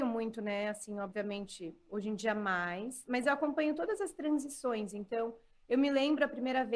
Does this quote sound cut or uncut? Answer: uncut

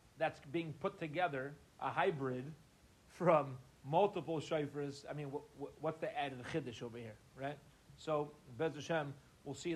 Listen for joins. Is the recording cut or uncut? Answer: cut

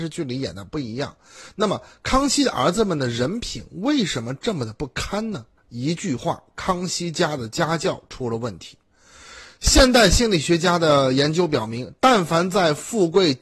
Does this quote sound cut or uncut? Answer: cut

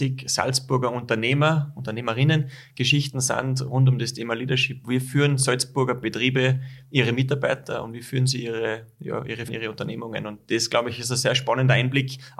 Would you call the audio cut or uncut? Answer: cut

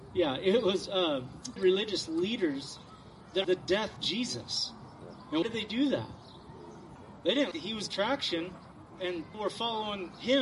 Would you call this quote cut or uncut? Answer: cut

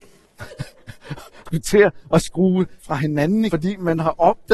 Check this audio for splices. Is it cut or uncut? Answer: cut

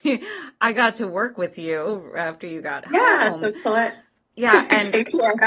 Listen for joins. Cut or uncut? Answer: uncut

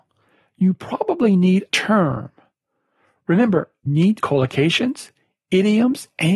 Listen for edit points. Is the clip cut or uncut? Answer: cut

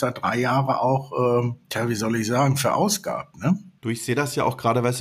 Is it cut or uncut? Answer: cut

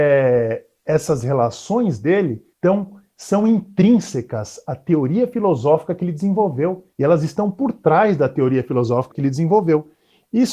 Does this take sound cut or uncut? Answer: cut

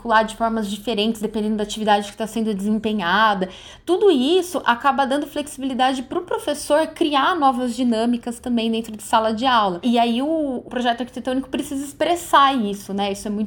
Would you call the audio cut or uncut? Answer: uncut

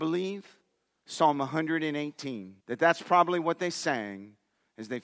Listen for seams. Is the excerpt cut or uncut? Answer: cut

